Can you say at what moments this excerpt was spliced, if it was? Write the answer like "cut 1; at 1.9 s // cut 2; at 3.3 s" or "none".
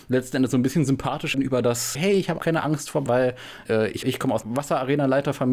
cut 1; at 1.3 s // cut 2; at 1.9 s // cut 3; at 2.4 s // cut 4; at 3.1 s // cut 5; at 3.7 s // cut 6; at 4.0 s // cut 7; at 4.4 s